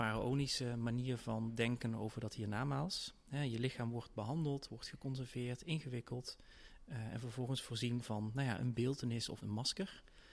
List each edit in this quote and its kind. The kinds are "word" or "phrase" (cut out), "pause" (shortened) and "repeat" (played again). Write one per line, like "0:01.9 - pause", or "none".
0:09.4 - word